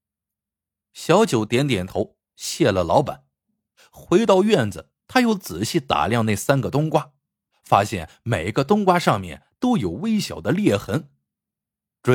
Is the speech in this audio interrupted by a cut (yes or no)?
yes